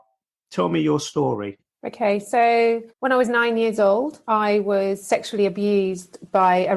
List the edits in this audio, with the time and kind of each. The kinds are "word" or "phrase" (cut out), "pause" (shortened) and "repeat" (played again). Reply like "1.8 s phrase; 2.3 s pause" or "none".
2.9 s pause; 4.2 s pause

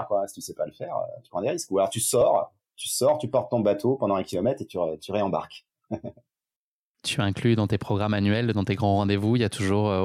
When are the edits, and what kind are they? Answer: none

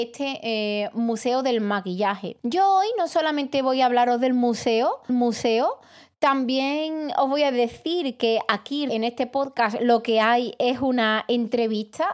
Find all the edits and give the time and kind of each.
2.4 s pause; 5.1 s repeat; 8.9 s word

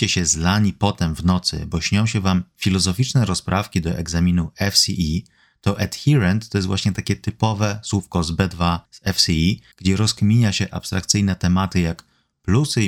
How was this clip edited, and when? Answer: 8.9 s pause; 9.7 s pause

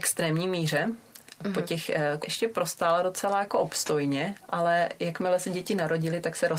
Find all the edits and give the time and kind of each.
2.2 s phrase

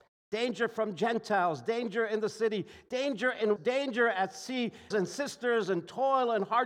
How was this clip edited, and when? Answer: 3.6 s word; 4.9 s phrase

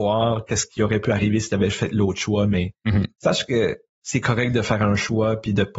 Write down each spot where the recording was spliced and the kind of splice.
none

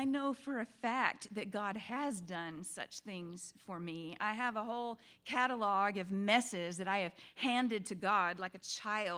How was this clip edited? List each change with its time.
none

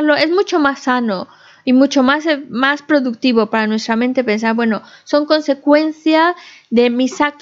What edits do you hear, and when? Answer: none

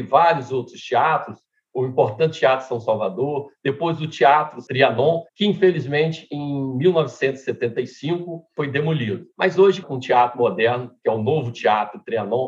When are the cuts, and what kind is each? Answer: 5.3 s pause; 9.3 s pause; 9.8 s phrase

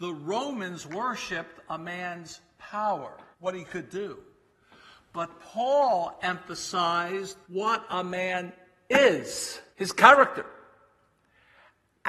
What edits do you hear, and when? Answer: 3.3 s pause; 7.4 s pause; 9.7 s pause

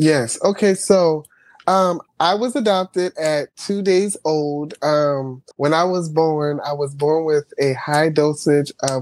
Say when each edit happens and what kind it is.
2.1 s pause; 5.5 s pause

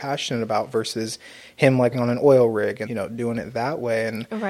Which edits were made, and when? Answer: 1.9 s word; 2.9 s word

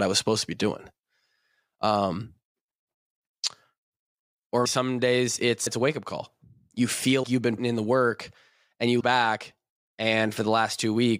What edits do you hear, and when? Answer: 4.7 s word; 5.7 s word; 7.2 s word; 7.6 s word; 9.0 s word

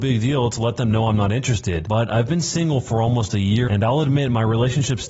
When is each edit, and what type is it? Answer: 3.7 s word

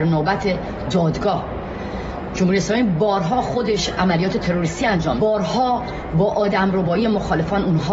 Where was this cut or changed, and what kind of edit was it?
5.2 s word

